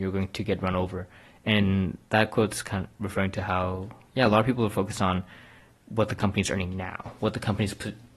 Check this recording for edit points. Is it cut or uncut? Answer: uncut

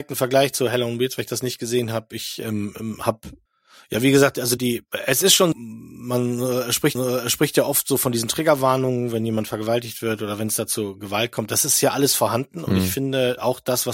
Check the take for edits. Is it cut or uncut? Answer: cut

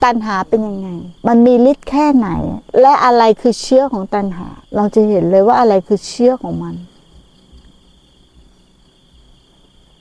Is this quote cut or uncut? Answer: cut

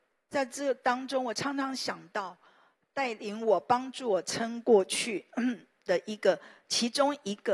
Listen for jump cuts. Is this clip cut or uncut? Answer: uncut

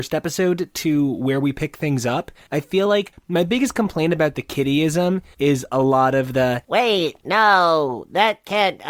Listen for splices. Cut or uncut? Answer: uncut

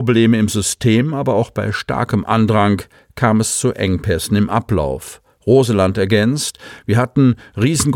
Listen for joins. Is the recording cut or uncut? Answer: uncut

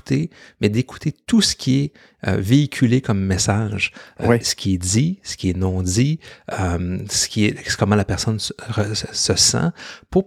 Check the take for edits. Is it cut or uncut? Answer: uncut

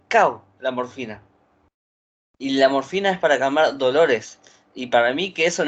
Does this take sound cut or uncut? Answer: uncut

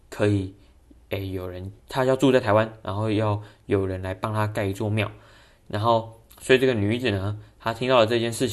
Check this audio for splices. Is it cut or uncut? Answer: cut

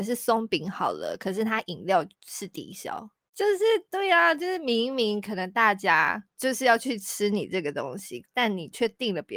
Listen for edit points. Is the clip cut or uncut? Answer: cut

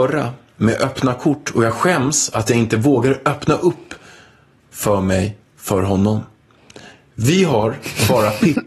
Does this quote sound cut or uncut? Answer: uncut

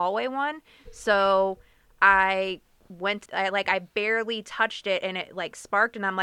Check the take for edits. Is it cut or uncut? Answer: cut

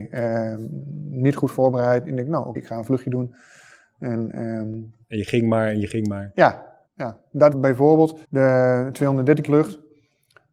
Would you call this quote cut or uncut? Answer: cut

